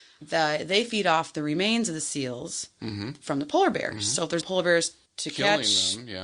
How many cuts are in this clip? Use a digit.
2